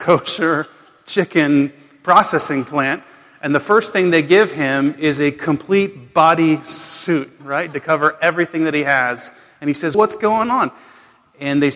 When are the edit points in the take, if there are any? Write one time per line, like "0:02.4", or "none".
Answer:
0:09.9